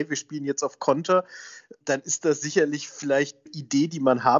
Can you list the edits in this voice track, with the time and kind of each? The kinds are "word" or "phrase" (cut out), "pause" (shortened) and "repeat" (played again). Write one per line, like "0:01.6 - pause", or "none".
0:01.8 - word
0:03.5 - phrase